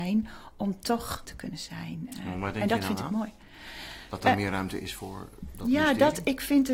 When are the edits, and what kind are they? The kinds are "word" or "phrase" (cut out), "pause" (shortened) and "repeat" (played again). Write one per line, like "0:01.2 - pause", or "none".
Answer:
0:01.3 - word